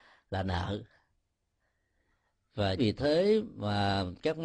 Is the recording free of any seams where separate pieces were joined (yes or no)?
no